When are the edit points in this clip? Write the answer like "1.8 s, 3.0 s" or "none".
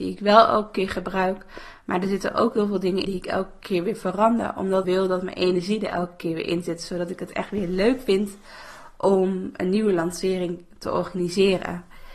3.1 s, 4.8 s